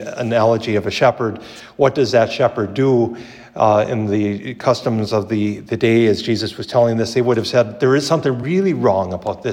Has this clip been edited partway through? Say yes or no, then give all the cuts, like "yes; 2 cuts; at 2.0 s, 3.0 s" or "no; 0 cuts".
no; 0 cuts